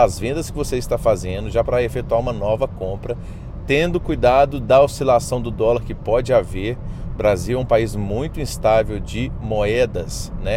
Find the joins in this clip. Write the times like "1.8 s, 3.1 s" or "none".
none